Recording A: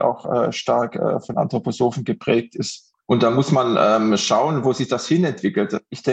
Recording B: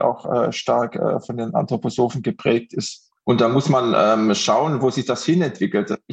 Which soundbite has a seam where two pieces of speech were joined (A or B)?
A